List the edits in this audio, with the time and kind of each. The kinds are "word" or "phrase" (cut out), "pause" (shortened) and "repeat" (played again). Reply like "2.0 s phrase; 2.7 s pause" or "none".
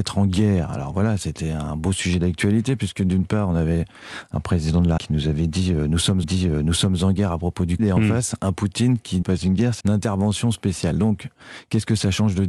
5.0 s word; 6.2 s repeat; 7.8 s word; 9.2 s phrase; 9.8 s word